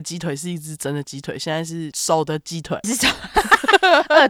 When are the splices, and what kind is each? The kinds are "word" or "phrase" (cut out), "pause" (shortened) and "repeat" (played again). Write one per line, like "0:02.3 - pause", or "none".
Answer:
0:02.8 - word